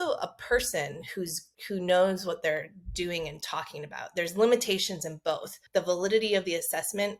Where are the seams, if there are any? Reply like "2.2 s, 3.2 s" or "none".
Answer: 1.5 s, 5.7 s